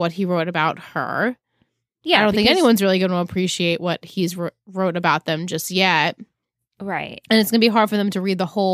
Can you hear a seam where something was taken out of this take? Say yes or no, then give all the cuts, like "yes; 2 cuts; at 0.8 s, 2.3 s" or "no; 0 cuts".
no; 0 cuts